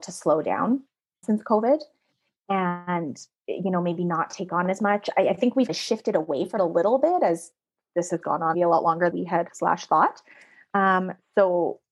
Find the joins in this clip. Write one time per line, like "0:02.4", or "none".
0:01.2
0:05.7
0:06.6
0:08.5
0:09.1
0:09.5